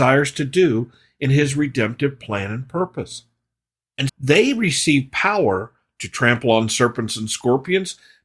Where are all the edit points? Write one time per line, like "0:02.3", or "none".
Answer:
0:04.1